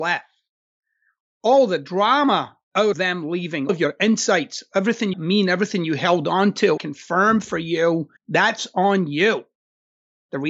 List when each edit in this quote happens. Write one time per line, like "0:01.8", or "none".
0:02.9
0:03.7
0:05.1
0:06.8
0:08.2